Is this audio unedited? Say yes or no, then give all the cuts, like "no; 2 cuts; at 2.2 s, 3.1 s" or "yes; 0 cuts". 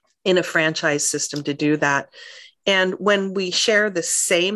yes; 0 cuts